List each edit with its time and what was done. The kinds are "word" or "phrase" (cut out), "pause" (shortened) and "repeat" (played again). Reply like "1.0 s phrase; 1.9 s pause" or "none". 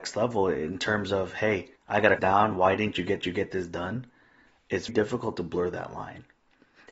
1.8 s pause; 2.2 s phrase; 3.2 s repeat; 4.9 s word